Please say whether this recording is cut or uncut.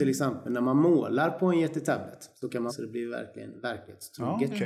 cut